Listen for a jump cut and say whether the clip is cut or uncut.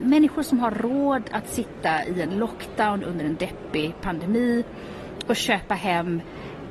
uncut